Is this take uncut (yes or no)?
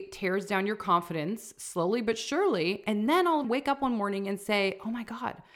no